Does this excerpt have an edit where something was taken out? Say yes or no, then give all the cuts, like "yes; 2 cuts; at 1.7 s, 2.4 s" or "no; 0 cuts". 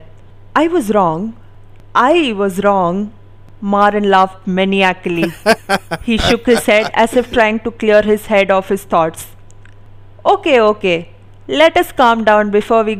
no; 0 cuts